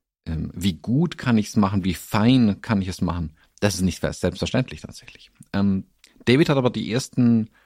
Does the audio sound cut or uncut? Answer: uncut